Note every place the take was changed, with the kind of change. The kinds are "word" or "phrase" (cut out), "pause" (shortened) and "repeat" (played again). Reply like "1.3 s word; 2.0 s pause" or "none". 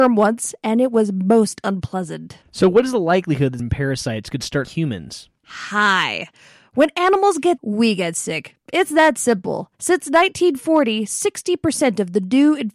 2.4 s pause; 3.6 s phrase; 4.6 s word; 5.4 s pause; 7.6 s word; 9.7 s pause